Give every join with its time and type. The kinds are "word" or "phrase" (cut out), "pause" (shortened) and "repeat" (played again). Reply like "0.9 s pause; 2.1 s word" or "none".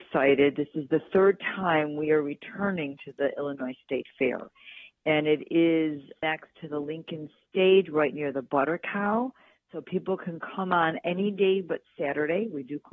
none